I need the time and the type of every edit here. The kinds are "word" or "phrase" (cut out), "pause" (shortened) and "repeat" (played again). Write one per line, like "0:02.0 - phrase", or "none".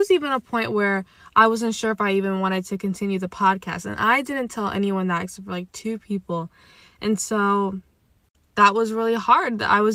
none